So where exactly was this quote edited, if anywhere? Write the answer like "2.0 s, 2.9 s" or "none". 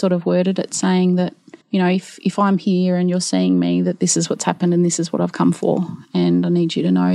1.6 s